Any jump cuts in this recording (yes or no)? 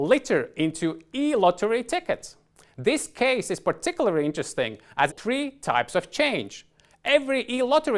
yes